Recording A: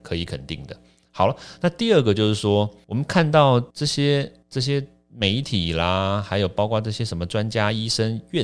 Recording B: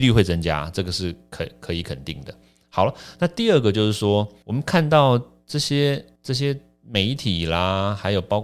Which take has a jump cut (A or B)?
A